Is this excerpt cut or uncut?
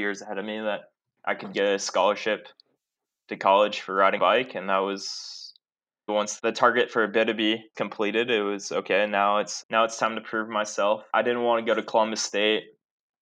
cut